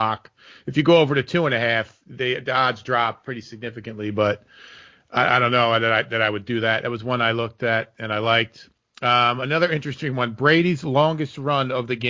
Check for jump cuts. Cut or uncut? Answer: uncut